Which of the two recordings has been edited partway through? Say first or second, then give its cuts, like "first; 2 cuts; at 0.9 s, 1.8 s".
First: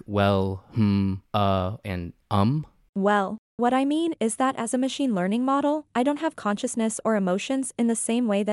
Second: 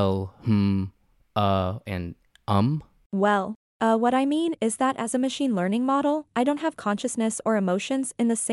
first; 3 cuts; at 1.3 s, 2.2 s, 3.6 s